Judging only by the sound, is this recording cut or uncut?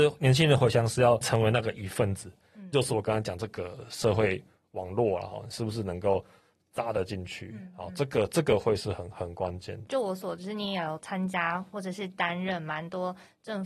uncut